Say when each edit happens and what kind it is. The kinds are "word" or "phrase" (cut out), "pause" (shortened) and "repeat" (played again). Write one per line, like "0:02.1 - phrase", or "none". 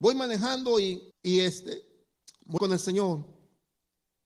0:01.1 - pause
0:02.6 - word